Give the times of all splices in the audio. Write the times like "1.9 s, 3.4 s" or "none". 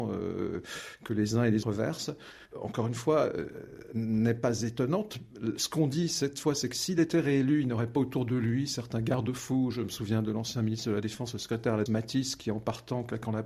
1.6 s, 11.9 s